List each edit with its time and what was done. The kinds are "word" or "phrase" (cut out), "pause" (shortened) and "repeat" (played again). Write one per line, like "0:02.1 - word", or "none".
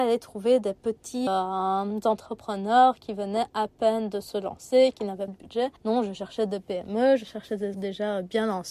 0:01.3 - word
0:05.3 - word
0:05.8 - pause
0:07.7 - word